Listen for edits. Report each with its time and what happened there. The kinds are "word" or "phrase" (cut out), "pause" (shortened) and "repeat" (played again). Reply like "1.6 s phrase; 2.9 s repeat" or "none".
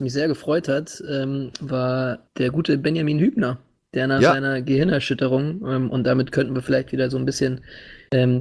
none